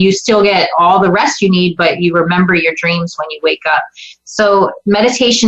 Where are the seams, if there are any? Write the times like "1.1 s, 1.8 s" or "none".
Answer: none